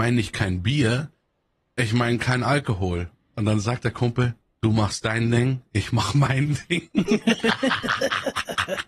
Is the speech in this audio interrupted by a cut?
no; 0 cuts

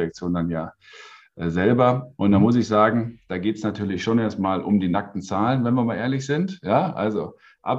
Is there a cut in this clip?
no; 0 cuts

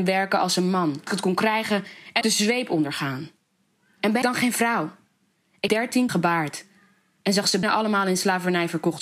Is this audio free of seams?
no; 6 cuts; at 1.1 s, 2.2 s, 4.2 s, 5.7 s, 6.1 s, 7.6 s

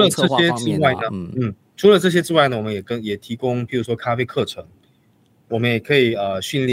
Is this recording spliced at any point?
no; 0 cuts

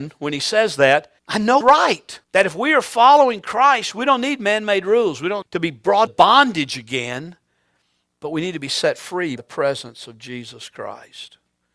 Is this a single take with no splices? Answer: no; 6 cuts; at 1.2 s, 1.6 s, 2.2 s, 5.4 s, 6.1 s, 9.4 s

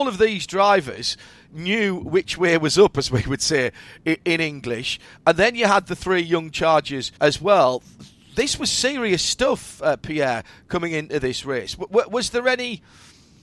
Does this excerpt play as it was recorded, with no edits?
no; 1 cut; at 7.2 s

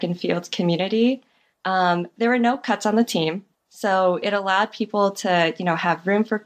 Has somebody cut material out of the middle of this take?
no; 0 cuts

